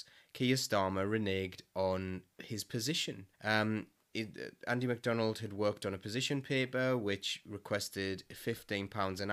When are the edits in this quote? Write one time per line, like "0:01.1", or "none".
0:02.3
0:03.3